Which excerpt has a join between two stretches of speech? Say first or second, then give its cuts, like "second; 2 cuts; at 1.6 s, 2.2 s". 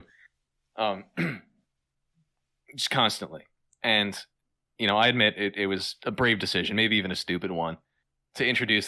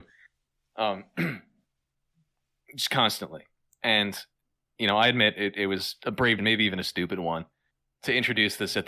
second; 1 cut; at 6.4 s